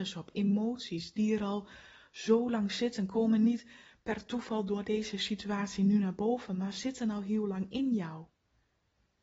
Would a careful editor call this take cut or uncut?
uncut